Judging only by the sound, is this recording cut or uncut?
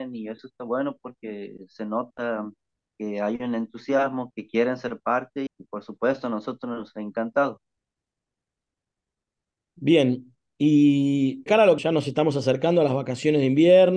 cut